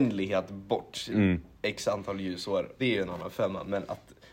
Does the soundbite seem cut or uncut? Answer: cut